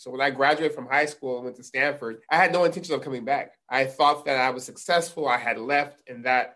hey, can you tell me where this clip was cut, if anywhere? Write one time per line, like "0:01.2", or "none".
0:02.2
0:03.6